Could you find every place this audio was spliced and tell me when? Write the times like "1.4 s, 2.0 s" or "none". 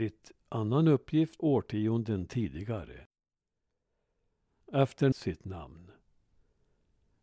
1.4 s, 5.1 s